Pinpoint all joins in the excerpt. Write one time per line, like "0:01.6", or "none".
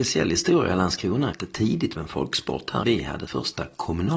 0:01.3
0:02.0
0:02.8
0:03.3